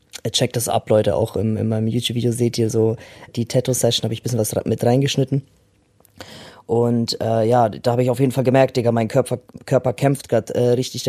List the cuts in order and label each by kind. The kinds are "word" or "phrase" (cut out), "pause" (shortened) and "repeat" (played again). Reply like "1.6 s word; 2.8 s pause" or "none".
3.3 s word